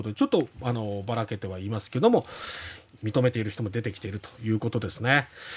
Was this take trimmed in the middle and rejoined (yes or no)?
no